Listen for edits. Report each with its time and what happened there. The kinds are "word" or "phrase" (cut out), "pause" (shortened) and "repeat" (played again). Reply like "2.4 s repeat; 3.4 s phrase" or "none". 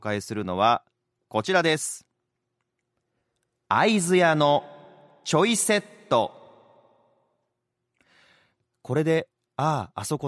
none